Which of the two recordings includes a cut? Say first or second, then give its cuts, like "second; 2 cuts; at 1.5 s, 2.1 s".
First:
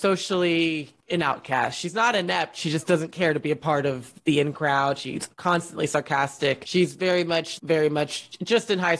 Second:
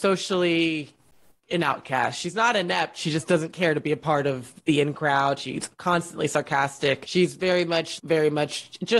first; 1 cut; at 1.0 s